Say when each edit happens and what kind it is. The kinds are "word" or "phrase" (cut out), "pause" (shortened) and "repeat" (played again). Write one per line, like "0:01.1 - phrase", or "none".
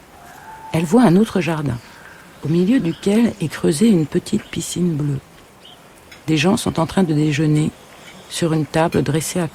none

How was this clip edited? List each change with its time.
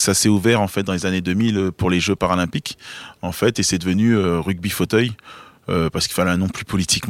none

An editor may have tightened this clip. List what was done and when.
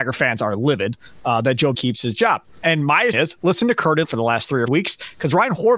0:01.7 - word
0:03.1 - word
0:04.0 - word
0:04.7 - word

